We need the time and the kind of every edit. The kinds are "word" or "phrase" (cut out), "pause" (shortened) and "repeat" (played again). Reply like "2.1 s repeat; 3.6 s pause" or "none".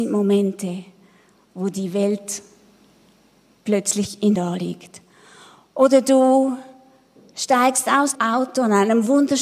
4.4 s word; 8.2 s word

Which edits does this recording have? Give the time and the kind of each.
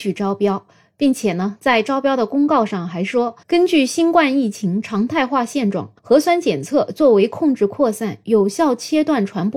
3.4 s pause; 6.0 s pause

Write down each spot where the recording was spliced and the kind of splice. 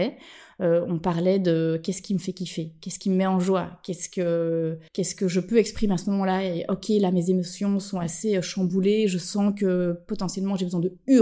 4.9 s pause

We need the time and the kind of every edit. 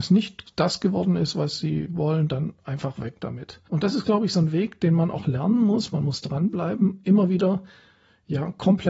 none

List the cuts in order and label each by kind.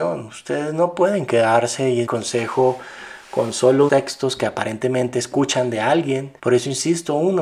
2.1 s word; 3.9 s word; 6.4 s pause

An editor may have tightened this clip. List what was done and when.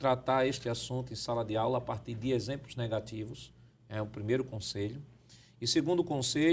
none

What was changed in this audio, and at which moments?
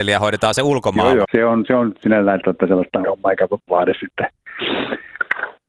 1.2 s word; 2.4 s word; 3.0 s phrase; 3.7 s word

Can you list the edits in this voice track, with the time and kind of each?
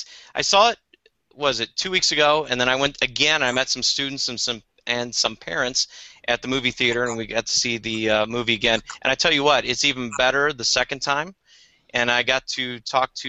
none

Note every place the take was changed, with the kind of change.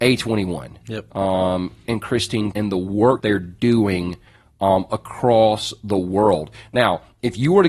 1.8 s word; 2.5 s word; 3.2 s word; 4.9 s word

